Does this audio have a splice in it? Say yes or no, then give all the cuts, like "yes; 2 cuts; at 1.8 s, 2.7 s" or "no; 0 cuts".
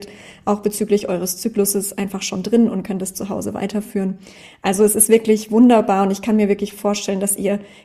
no; 0 cuts